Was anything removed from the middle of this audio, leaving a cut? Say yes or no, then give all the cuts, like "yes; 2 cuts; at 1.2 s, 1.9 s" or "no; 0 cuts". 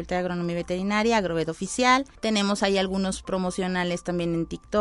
yes; 1 cut; at 2.2 s